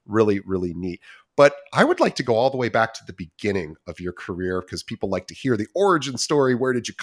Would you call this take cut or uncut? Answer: uncut